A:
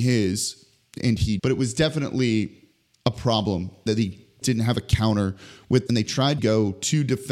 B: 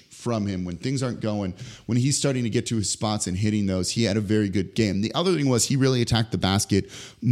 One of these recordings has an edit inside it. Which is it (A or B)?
A